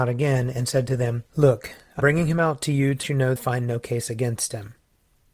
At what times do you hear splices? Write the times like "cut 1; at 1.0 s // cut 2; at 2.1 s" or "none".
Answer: cut 1; at 1.3 s // cut 2; at 2.0 s // cut 3; at 3.0 s // cut 4; at 3.4 s